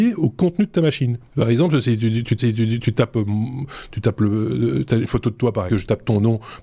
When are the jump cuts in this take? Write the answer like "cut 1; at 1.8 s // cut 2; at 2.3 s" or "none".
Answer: cut 1; at 1.3 s // cut 2; at 2.4 s // cut 3; at 5.0 s // cut 4; at 5.7 s